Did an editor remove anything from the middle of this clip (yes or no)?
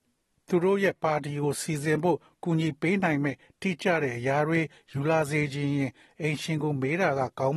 no